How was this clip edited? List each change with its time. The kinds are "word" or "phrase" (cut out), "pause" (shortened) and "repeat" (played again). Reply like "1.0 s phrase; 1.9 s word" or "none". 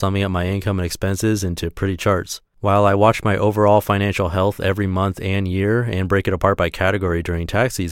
2.5 s pause